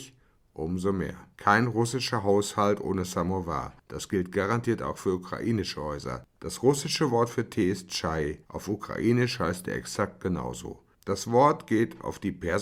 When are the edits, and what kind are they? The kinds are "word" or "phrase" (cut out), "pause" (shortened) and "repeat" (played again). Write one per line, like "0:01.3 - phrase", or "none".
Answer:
0:01.3 - pause
0:08.4 - pause